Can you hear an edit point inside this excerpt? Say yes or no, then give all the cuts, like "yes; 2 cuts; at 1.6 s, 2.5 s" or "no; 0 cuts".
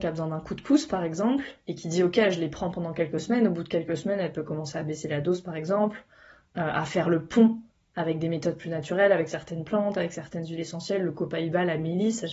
no; 0 cuts